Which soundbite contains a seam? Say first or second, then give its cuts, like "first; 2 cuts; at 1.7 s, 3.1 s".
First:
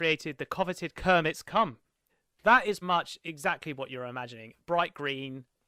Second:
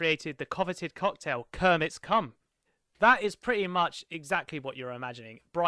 first; 2 cuts; at 0.9 s, 2.8 s